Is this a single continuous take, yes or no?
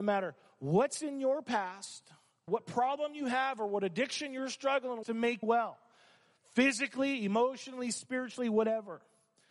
no